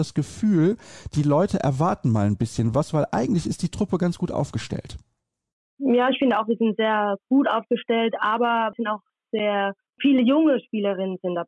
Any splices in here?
no; 0 cuts

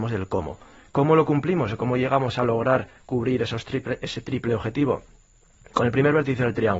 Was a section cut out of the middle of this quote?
no; 0 cuts

